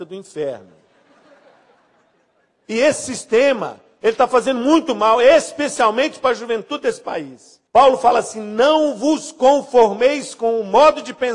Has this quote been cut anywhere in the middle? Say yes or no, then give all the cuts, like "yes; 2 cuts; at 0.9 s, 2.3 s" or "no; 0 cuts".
yes; 1 cut; at 7.7 s